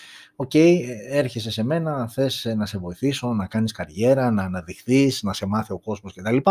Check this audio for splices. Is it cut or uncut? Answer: uncut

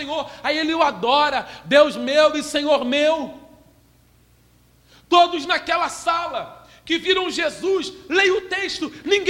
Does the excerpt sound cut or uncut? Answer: uncut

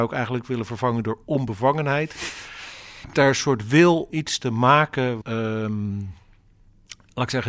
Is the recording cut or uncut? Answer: cut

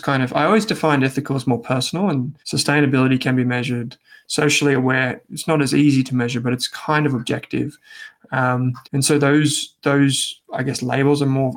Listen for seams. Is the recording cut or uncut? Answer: cut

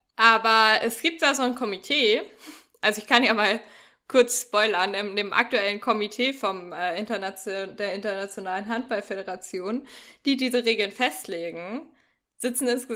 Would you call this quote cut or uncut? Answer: uncut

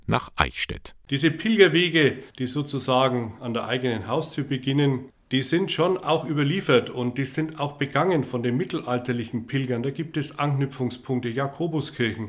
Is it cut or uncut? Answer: cut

